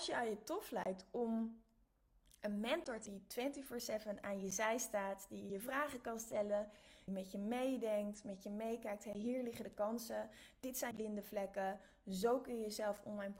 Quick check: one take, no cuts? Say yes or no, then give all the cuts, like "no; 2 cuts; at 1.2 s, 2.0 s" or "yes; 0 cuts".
no; 4 cuts; at 3.1 s, 5.5 s, 7.1 s, 10.9 s